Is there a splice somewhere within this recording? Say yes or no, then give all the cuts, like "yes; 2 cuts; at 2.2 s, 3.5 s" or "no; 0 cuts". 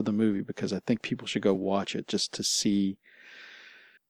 no; 0 cuts